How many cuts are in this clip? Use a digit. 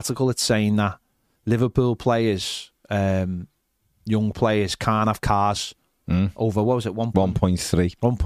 0